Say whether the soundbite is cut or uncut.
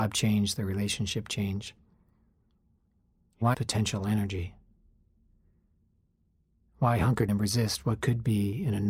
cut